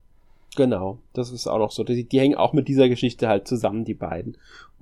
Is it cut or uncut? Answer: uncut